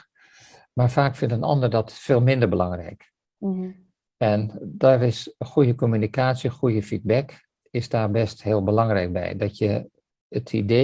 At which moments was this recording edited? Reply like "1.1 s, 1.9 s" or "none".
none